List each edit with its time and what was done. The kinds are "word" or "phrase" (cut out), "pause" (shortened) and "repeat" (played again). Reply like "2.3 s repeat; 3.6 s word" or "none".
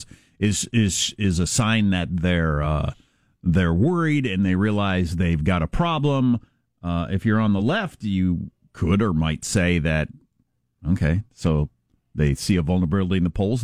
none

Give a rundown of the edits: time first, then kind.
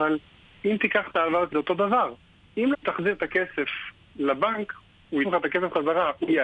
1.5 s word; 2.7 s word; 5.2 s word

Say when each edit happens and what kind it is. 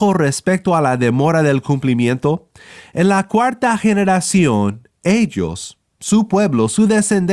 none

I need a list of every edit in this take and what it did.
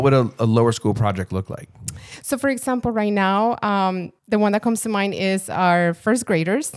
4.2 s pause

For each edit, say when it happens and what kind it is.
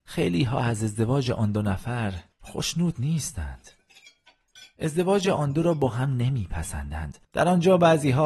2.3 s pause; 7.2 s pause

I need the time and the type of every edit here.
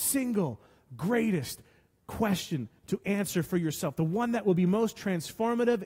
none

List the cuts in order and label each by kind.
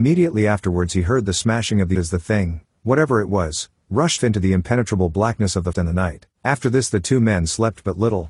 1.9 s word; 4.2 s word; 5.7 s word; 6.3 s pause

